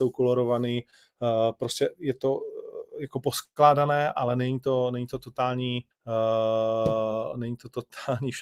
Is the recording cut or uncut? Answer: cut